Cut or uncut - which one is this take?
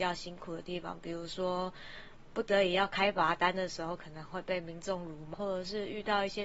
cut